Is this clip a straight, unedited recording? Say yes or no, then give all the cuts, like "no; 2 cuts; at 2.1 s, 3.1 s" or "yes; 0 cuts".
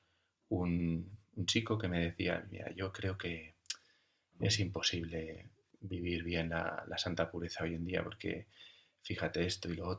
yes; 0 cuts